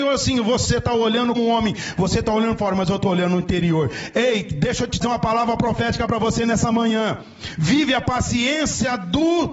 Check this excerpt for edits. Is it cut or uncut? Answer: cut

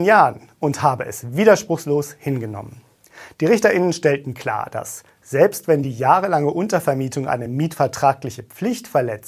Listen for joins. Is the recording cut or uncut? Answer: uncut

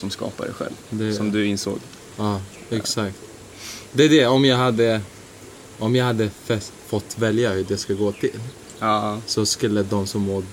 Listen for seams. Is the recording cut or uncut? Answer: uncut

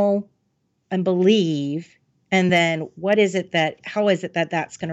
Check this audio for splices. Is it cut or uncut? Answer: uncut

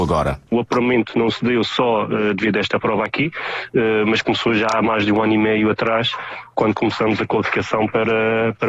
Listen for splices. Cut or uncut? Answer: uncut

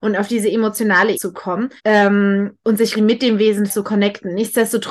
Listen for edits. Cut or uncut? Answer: cut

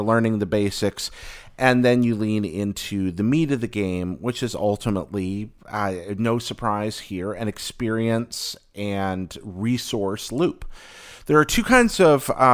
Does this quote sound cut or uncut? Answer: uncut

